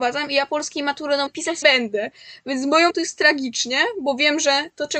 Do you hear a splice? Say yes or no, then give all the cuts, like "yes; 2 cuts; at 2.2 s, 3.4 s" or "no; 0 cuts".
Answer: yes; 3 cuts; at 1.3 s, 1.6 s, 2.9 s